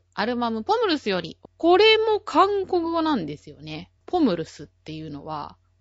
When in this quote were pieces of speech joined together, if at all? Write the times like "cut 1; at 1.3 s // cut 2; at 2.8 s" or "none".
cut 1; at 1.4 s // cut 2; at 4.0 s